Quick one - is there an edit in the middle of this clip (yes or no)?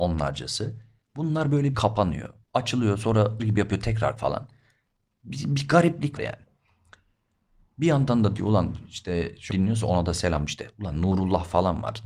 yes